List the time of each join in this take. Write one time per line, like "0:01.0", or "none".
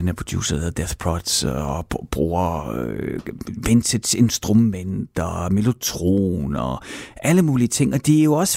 none